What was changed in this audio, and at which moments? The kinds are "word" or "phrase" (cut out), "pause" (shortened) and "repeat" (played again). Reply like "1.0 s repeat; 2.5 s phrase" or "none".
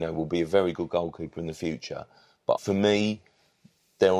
2.6 s word